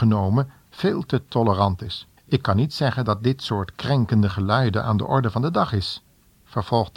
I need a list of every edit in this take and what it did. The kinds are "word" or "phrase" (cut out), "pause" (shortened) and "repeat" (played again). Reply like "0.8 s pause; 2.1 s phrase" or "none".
2.2 s pause